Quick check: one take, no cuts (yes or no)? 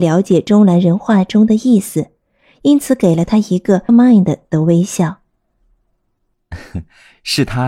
no